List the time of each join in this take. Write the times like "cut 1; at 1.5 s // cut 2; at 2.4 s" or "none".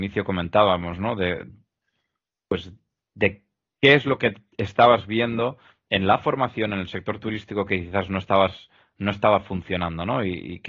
none